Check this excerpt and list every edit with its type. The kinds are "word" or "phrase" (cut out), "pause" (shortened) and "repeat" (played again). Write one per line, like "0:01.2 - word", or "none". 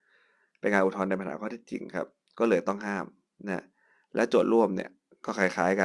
none